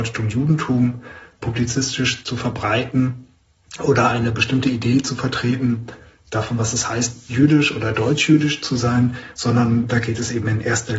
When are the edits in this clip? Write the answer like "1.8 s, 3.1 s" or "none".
none